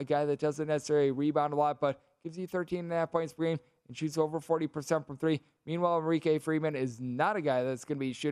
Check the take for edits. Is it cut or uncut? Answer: uncut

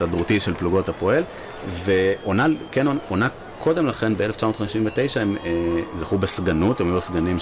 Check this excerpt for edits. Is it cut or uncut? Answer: uncut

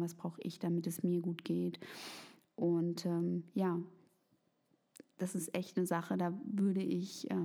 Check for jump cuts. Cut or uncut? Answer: uncut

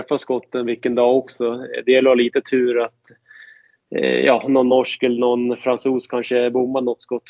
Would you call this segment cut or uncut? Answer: uncut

